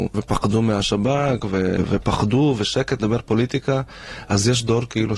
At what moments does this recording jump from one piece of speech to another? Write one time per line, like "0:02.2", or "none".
0:03.0